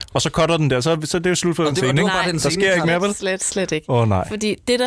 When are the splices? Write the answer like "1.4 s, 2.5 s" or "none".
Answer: none